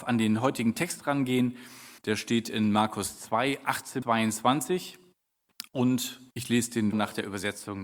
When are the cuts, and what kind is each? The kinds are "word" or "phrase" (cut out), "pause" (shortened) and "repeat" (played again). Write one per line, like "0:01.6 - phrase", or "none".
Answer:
0:02.0 - pause
0:04.0 - word
0:06.3 - pause
0:06.9 - word

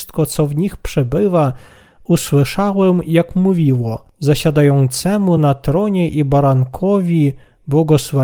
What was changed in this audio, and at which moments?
none

